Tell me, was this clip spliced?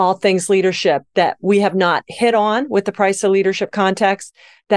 no; 0 cuts

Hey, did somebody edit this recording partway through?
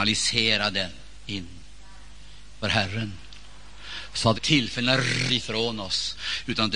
yes; 3 cuts; at 2.6 s, 4.3 s, 5.3 s

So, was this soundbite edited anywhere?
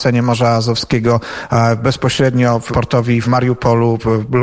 yes; 2 cuts; at 2.7 s, 3.2 s

